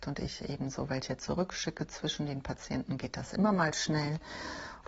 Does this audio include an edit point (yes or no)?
no